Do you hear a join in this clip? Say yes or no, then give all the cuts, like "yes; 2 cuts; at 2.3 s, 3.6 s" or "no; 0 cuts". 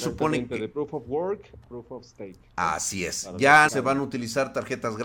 yes; 2 cuts; at 1.6 s, 3.7 s